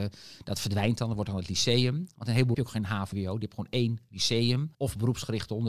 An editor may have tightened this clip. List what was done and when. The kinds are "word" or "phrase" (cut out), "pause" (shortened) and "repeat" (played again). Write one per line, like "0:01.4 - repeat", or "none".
0:02.5 - phrase
0:03.1 - phrase
0:04.7 - pause